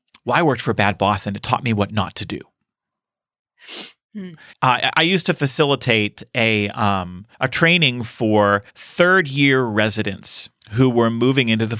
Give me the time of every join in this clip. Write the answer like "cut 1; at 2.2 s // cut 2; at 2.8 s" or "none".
cut 1; at 4.5 s // cut 2; at 7.3 s // cut 3; at 8.7 s // cut 4; at 10.6 s

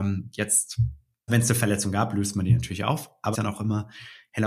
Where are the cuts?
cut 1; at 1.3 s // cut 2; at 3.3 s

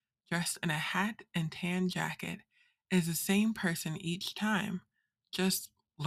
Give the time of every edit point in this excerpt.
none

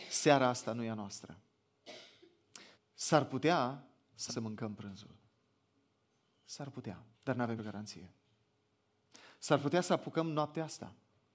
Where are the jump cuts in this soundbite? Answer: cut 1; at 2.7 s // cut 2; at 4.3 s // cut 3; at 7.1 s // cut 4; at 7.6 s

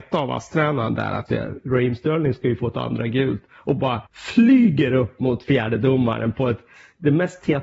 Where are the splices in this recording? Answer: cut 1; at 1.3 s // cut 2; at 4.1 s

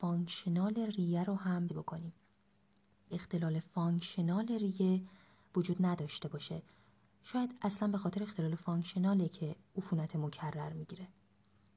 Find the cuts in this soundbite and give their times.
cut 1; at 1.7 s // cut 2; at 3.1 s

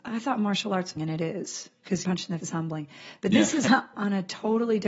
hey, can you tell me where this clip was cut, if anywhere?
cut 1; at 1.0 s // cut 2; at 2.0 s // cut 3; at 2.4 s // cut 4; at 3.7 s

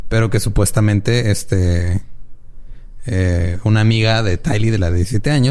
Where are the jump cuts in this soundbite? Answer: none

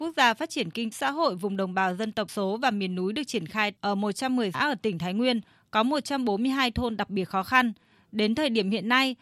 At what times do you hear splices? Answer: cut 1; at 0.9 s // cut 2; at 2.3 s // cut 3; at 4.5 s

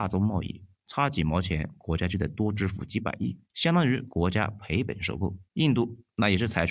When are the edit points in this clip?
cut 1; at 3.4 s // cut 2; at 5.4 s

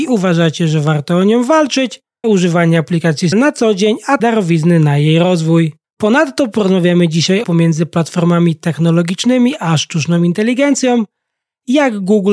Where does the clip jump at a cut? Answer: cut 1; at 2.2 s // cut 2; at 3.3 s // cut 3; at 4.2 s // cut 4; at 5.8 s // cut 5; at 7.4 s

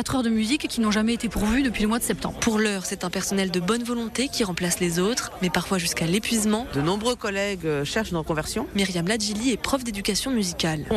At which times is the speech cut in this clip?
none

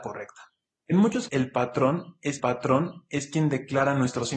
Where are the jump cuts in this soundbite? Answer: cut 1; at 1.3 s // cut 2; at 2.4 s

